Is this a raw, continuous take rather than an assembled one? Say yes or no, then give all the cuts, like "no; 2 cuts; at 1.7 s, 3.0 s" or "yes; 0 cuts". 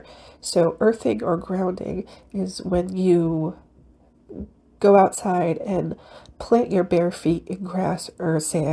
yes; 0 cuts